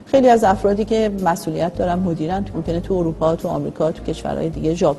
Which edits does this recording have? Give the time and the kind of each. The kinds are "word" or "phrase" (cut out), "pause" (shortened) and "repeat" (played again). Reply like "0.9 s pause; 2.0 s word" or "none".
2.5 s word